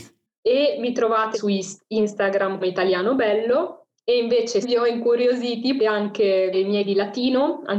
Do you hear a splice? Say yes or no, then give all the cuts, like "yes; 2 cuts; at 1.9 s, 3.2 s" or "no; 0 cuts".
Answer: yes; 6 cuts; at 1.3 s, 2.6 s, 4.6 s, 5.8 s, 6.5 s, 6.8 s